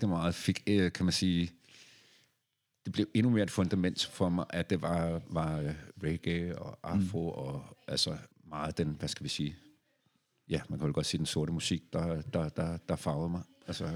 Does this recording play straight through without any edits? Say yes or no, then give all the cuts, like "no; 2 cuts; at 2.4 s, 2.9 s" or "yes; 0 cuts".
no; 1 cut; at 8.3 s